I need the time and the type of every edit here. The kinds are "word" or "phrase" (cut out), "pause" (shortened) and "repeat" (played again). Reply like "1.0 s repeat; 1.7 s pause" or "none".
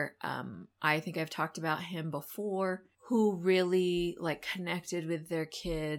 2.9 s pause